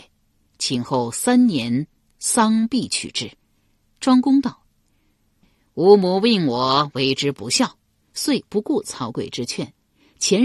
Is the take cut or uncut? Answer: uncut